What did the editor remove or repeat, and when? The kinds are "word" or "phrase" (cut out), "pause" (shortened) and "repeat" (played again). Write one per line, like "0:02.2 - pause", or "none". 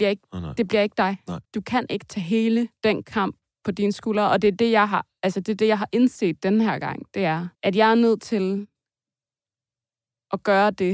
0:01.4 - pause
0:02.8 - pause
0:07.5 - pause